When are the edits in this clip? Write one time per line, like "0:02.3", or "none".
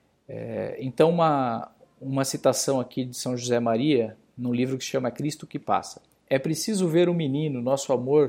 0:06.1